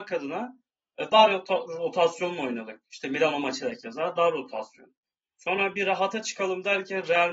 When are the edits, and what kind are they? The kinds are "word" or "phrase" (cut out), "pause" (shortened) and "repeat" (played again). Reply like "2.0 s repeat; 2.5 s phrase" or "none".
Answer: none

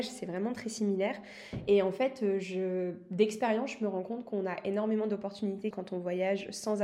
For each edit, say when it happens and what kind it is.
5.7 s phrase

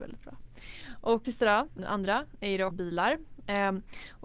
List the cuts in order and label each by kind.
1.2 s word; 1.8 s word; 2.7 s word

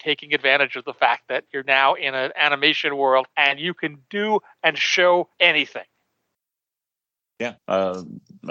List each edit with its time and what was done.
3.3 s pause; 5.3 s pause; 7.6 s pause

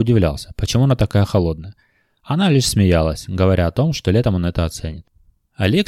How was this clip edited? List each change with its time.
none

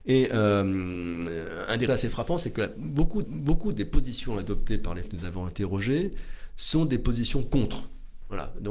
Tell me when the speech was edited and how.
1.9 s word; 3.2 s repeat; 5.0 s word

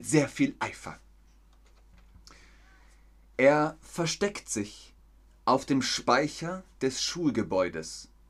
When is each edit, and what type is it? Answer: none

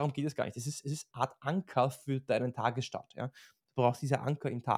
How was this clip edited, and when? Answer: 1.1 s word

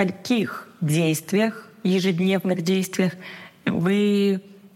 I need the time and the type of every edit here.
none

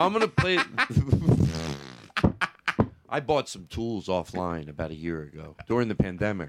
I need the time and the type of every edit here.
none

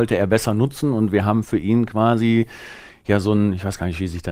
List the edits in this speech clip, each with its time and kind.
none

